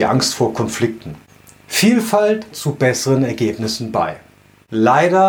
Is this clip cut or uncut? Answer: cut